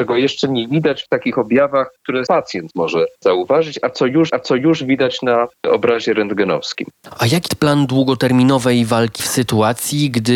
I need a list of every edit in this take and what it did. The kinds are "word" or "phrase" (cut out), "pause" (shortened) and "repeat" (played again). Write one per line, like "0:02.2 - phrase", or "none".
0:02.3 - word
0:03.1 - pause
0:04.3 - repeat
0:07.5 - word
0:09.2 - phrase